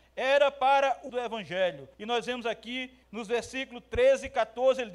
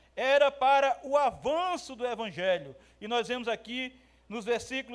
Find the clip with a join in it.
first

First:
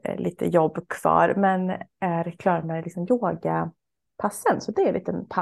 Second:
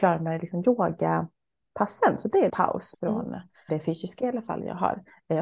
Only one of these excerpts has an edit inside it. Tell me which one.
second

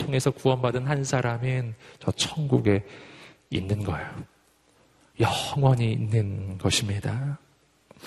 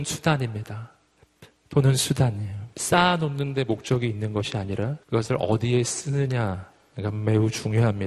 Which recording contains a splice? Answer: second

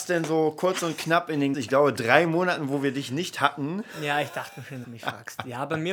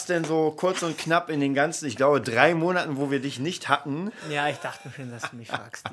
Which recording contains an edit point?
first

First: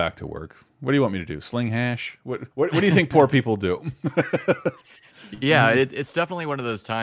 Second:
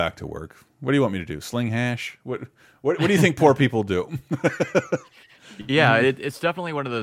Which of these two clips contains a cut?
first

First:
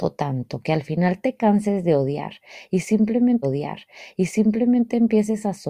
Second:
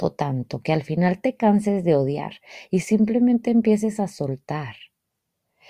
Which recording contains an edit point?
first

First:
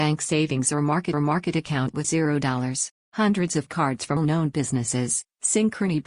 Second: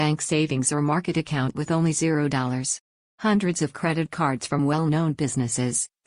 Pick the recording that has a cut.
first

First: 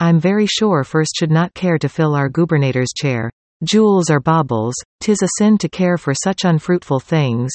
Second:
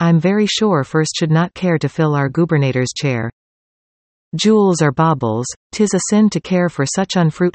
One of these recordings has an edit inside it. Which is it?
first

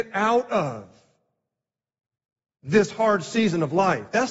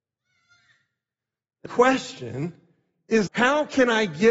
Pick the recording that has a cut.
second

